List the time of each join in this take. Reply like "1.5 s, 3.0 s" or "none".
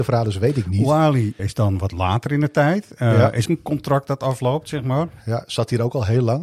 1.4 s, 3.5 s